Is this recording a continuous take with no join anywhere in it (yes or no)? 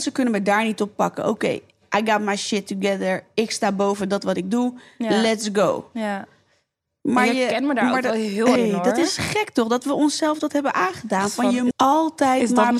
no